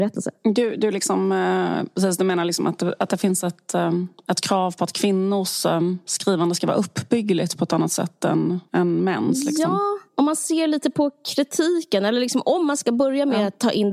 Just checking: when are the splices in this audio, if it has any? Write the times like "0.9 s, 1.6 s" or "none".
8.7 s, 10.1 s